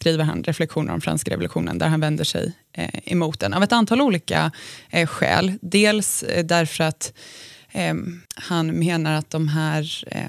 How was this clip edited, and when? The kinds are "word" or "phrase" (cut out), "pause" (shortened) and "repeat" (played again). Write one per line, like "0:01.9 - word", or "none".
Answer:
0:08.3 - pause